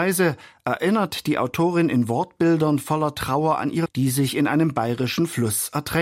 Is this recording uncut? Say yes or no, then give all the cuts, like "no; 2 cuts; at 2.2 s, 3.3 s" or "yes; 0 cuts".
no; 1 cut; at 3.9 s